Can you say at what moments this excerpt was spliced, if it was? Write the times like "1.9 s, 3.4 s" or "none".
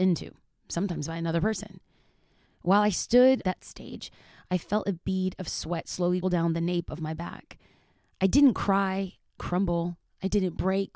3.4 s, 6.2 s, 9.4 s